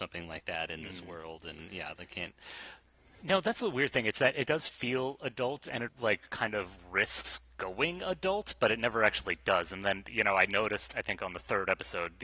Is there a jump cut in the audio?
yes; 2 cuts; at 5.9 s, 10.9 s

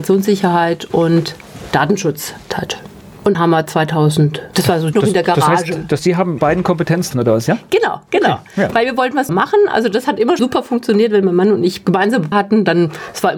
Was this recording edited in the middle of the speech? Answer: yes; 9 cuts; at 2.5 s, 3.3 s, 4.9 s, 6.0 s, 6.4 s, 7.1 s, 9.3 s, 10.4 s, 12.3 s

